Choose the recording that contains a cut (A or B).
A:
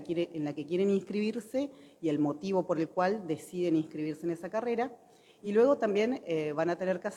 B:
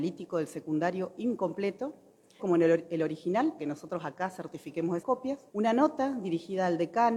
B